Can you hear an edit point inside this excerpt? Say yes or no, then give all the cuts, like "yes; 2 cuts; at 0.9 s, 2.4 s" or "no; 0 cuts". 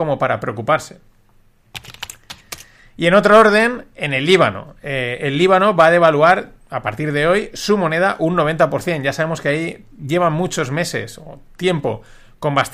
no; 0 cuts